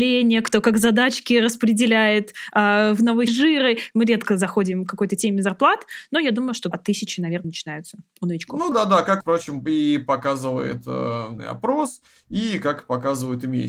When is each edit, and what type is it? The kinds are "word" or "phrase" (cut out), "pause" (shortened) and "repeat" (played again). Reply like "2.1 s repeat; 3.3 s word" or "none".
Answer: 3.3 s word; 6.7 s word; 7.4 s word; 8.7 s word; 9.2 s word; 11.4 s word